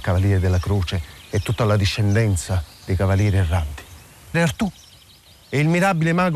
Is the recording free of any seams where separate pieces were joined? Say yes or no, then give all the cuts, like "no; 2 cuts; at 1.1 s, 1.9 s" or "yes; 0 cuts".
no; 1 cut; at 4.3 s